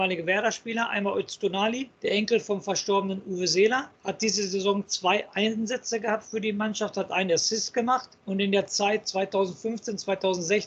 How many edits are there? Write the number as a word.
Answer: three